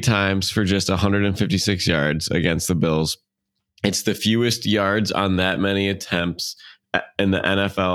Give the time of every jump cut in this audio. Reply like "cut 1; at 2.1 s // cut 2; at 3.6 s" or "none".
none